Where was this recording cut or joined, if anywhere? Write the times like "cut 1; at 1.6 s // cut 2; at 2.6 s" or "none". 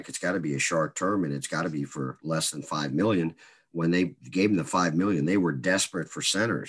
none